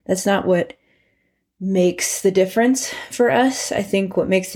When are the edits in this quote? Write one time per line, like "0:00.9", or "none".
none